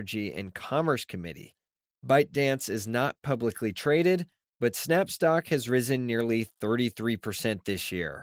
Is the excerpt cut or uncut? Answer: uncut